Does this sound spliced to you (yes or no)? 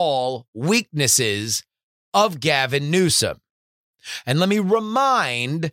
no